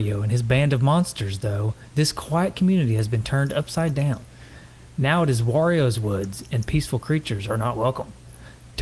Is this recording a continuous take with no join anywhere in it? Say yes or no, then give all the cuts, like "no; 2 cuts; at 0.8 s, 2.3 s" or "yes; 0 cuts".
yes; 0 cuts